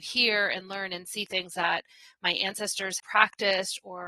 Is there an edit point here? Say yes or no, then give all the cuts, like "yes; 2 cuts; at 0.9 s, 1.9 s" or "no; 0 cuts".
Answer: yes; 1 cut; at 3.0 s